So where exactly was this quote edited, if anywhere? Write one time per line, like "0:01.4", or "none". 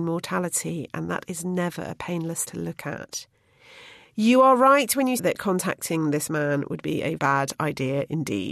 0:02.5
0:05.2
0:07.2